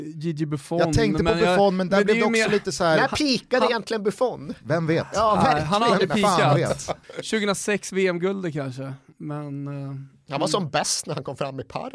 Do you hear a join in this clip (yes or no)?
yes